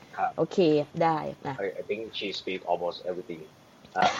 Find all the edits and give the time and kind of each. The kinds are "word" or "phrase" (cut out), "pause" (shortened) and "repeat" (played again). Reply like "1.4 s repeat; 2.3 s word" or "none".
0.9 s pause